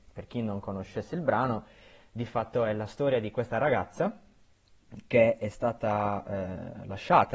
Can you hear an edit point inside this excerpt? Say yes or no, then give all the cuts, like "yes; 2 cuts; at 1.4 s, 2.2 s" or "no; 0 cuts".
no; 0 cuts